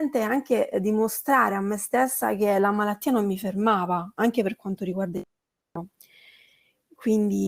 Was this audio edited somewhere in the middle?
no; 0 cuts

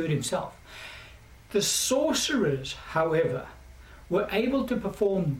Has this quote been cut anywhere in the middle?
no; 0 cuts

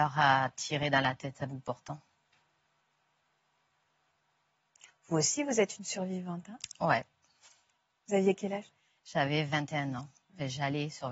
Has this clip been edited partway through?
no; 0 cuts

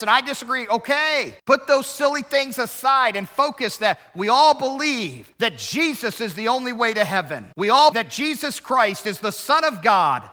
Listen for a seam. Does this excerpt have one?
yes; 3 cuts; at 1.4 s, 7.5 s, 7.9 s

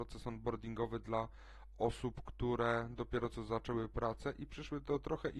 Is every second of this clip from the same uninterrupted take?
yes; 0 cuts

